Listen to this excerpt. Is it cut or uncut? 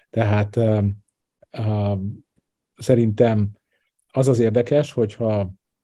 uncut